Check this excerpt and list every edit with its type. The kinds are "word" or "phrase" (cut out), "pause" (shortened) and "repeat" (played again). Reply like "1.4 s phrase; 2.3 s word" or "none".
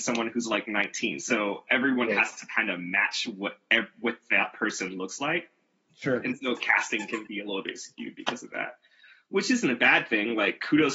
none

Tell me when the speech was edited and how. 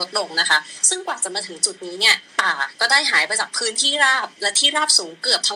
2.3 s pause

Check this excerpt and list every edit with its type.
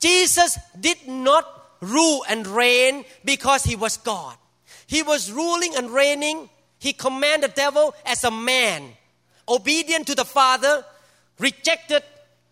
none

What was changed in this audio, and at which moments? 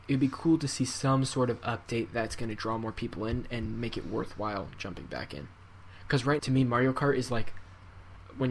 6.4 s word

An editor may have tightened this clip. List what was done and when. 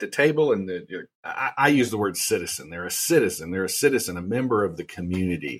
1.1 s pause

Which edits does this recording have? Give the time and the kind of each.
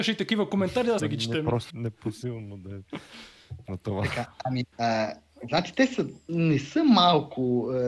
1.0 s phrase; 1.7 s phrase; 3.7 s word; 4.7 s pause

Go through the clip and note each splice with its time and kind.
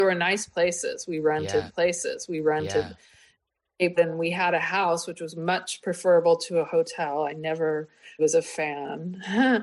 1.7 s repeat; 4.0 s word; 8.2 s word

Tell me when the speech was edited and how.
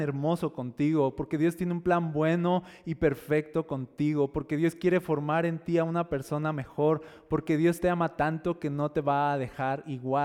none

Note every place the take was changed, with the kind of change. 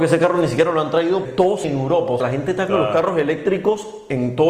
1.2 s word; 1.6 s word; 2.2 s word; 2.7 s word

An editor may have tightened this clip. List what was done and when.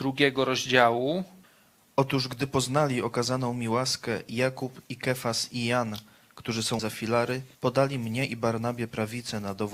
1.4 s pause; 6.8 s word; 7.5 s pause

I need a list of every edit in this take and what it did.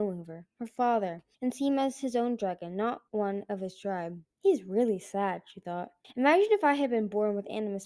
1.3 s pause; 3.1 s pause; 4.3 s pause; 6.0 s pause

